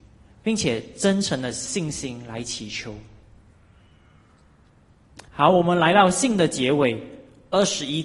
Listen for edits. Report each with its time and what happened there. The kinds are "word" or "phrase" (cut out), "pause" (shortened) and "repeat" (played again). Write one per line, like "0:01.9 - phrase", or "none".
0:05.3 - pause